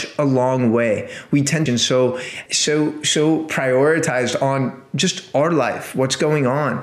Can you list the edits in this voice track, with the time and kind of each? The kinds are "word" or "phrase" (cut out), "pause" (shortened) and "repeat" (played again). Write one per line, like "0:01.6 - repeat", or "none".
0:01.7 - phrase
0:02.5 - word